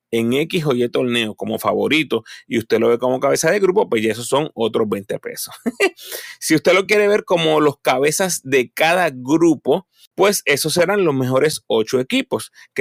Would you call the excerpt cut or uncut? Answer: uncut